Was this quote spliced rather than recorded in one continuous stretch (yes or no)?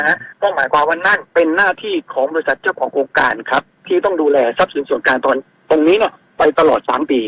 yes